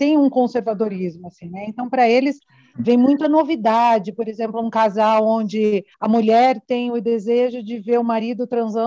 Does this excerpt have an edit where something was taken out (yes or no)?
yes